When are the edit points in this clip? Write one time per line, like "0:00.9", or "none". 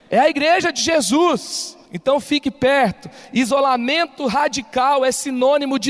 0:01.9